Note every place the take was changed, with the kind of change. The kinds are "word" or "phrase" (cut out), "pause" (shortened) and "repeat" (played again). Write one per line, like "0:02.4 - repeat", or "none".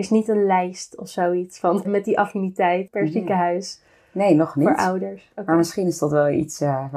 0:01.8 - word